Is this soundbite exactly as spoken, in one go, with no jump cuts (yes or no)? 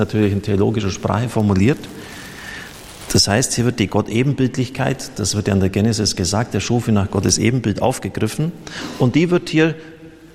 yes